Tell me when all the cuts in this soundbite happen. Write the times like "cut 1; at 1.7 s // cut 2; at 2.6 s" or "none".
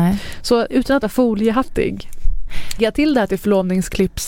cut 1; at 1.0 s // cut 2; at 2.8 s